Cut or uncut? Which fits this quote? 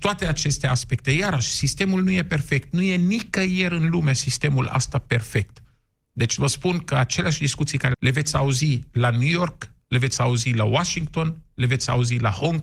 cut